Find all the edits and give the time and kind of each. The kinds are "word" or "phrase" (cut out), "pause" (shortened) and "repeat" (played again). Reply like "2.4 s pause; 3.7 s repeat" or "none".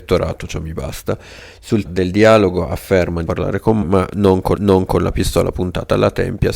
1.8 s word; 3.3 s phrase; 3.8 s word; 4.5 s repeat